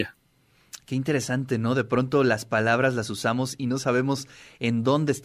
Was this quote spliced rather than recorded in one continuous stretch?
no; 0 cuts

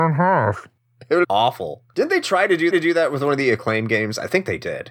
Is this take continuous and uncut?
no; 3 cuts; at 1.2 s, 1.9 s, 2.7 s

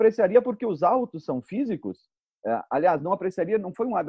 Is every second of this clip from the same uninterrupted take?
yes; 0 cuts

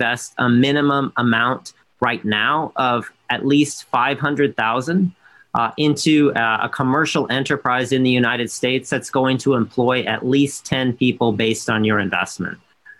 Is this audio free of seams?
yes; 0 cuts

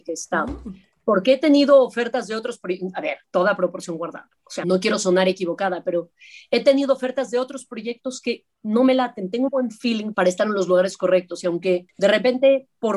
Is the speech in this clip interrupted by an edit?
yes; 4 cuts; at 4.6 s, 8.5 s, 9.5 s, 10.1 s

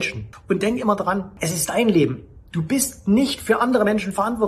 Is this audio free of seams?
yes; 0 cuts

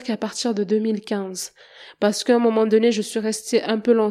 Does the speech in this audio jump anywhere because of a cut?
no; 0 cuts

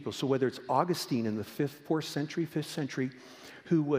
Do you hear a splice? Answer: no; 0 cuts

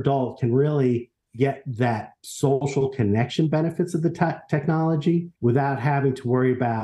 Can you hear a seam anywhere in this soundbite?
yes; 1 cut; at 5.3 s

